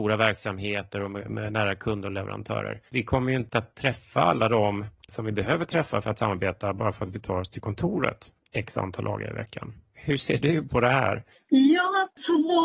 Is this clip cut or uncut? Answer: uncut